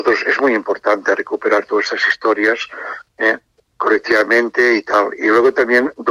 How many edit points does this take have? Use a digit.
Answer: 1